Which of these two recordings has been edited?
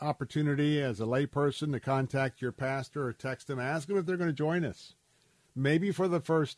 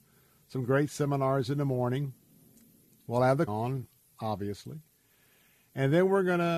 second; 1 cut; at 3.5 s

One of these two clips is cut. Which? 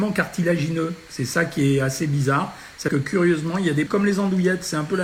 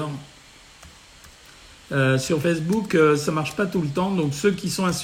first; 2 cuts; at 2.9 s, 3.9 s

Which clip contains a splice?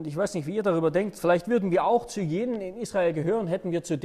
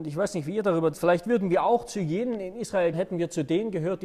second; 2 cuts; at 0.9 s, 2.9 s

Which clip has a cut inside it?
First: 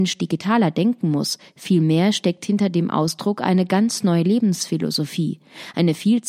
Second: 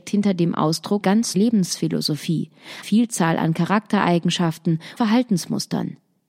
second; 4 cuts; at 1.0 s, 1.3 s, 2.8 s, 5.0 s

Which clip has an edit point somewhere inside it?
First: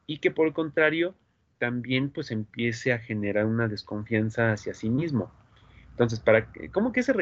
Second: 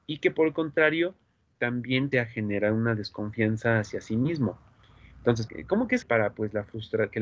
second; 3 cuts; at 2.1 s, 5.5 s, 6.0 s

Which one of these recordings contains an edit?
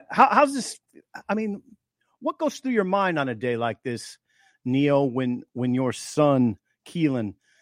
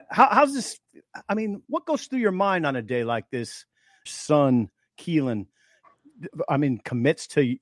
second; 2 cuts; at 1.6 s, 4.1 s

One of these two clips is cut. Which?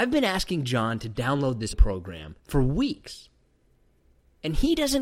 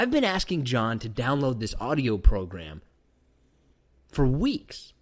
first; 2 cuts; at 1.7 s, 2.4 s

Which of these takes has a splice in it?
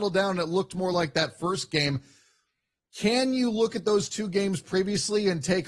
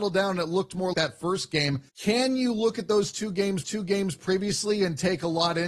second; 3 cuts; at 0.9 s, 1.9 s, 3.6 s

